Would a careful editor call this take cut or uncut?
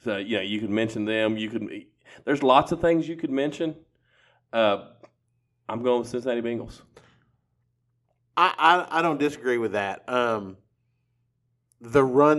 uncut